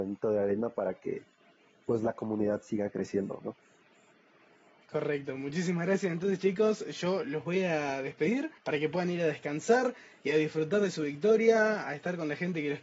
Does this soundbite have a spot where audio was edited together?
yes; 1 cut; at 8.6 s

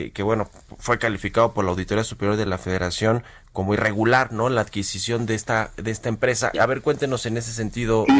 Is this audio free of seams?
no; 1 cut; at 6.5 s

